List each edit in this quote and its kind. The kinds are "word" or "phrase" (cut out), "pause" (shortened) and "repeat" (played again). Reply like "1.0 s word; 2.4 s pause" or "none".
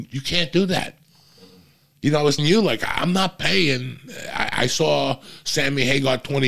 2.4 s word